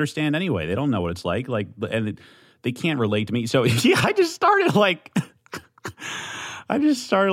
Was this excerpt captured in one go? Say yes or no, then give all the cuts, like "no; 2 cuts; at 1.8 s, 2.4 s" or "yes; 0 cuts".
yes; 0 cuts